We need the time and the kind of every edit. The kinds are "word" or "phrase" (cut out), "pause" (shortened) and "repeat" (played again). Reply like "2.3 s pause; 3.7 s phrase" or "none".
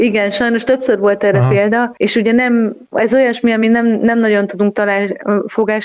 none